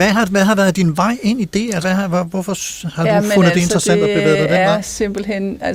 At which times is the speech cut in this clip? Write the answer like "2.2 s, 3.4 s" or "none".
1.8 s